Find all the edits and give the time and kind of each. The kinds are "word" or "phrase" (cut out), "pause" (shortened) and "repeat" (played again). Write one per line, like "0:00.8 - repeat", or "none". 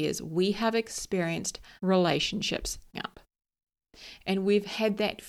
0:01.8 - word
0:02.9 - word

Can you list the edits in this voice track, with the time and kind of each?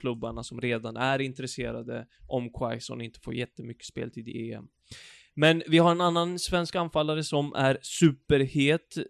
none

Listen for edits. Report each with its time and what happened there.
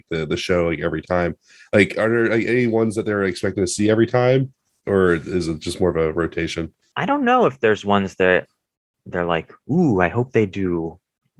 none

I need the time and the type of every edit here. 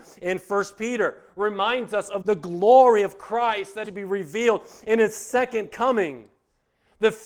0:02.2 - word
0:03.8 - phrase

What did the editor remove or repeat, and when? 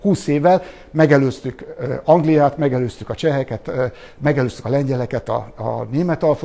none

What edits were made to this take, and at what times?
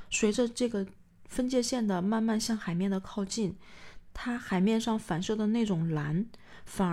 none

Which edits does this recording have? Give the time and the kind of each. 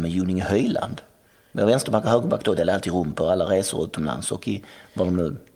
none

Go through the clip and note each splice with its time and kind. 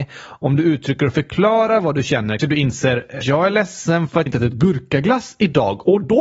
0:02.4 - word
0:03.2 - word
0:04.3 - word

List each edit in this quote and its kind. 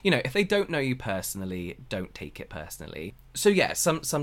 none

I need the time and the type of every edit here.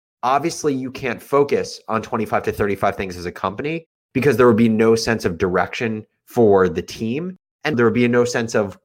0:07.7 - word

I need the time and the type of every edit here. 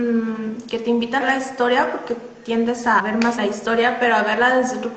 0:01.2 - phrase
0:03.0 - word
0:03.4 - phrase

